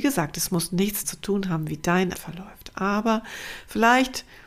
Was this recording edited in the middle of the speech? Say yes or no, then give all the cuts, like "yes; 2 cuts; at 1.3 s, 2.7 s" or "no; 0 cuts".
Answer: yes; 2 cuts; at 1.0 s, 2.1 s